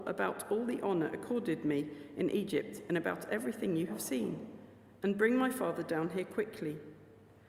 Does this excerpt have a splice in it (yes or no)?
no